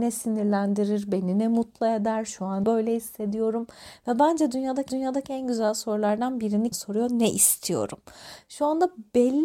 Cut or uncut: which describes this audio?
cut